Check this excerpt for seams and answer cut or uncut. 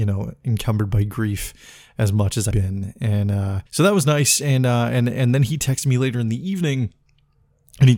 cut